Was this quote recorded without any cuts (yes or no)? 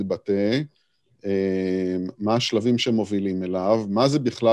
yes